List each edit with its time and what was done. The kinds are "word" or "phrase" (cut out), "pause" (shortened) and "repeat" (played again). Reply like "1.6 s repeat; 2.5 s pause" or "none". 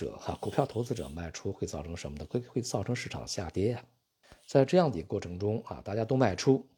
none